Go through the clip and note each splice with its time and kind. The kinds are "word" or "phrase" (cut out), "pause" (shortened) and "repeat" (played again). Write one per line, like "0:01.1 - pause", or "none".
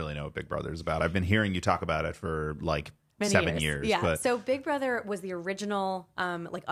none